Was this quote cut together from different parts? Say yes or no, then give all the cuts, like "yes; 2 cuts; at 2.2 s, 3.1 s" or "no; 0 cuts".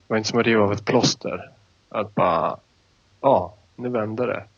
no; 0 cuts